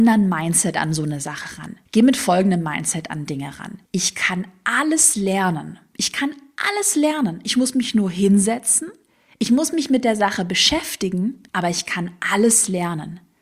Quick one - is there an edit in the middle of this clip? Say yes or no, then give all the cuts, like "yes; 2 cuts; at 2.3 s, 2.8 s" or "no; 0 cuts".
yes; 3 cuts; at 1.9 s, 3.9 s, 11.5 s